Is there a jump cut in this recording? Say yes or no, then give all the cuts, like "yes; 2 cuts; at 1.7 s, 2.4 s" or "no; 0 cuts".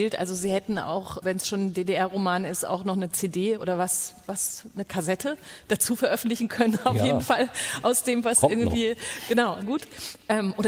yes; 2 cuts; at 1.2 s, 9.6 s